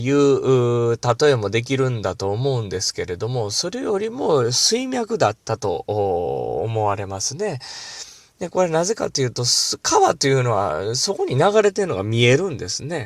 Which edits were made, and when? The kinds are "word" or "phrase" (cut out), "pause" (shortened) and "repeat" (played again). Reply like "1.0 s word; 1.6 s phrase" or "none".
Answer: none